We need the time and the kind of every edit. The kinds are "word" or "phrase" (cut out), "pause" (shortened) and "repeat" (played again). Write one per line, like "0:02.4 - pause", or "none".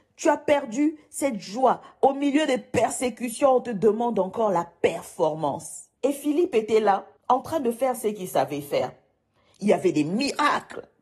0:06.0 - pause
0:07.2 - pause